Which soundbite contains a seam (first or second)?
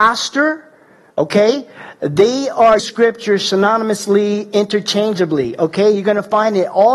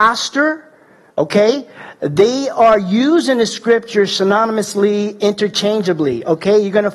first